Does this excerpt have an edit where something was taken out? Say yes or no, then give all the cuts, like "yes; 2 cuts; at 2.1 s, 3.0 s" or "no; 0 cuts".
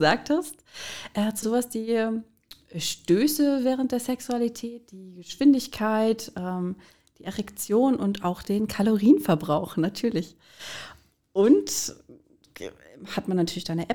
yes; 1 cut; at 1.4 s